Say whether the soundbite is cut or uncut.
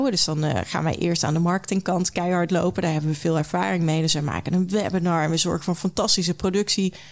uncut